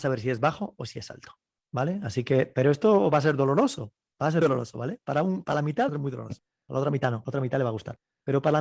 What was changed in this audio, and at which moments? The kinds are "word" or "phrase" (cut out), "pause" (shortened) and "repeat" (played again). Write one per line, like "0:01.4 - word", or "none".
0:04.4 - word
0:05.9 - phrase